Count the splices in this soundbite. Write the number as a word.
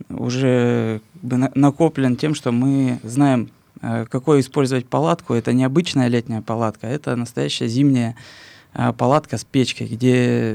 one